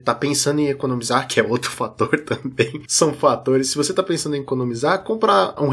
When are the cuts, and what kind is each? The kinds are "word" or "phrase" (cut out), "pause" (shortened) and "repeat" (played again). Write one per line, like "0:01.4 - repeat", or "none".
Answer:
none